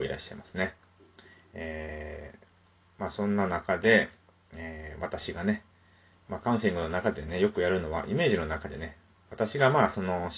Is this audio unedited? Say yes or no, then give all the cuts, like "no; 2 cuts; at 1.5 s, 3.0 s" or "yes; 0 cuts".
yes; 0 cuts